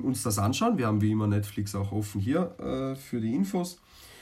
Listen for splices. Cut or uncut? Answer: uncut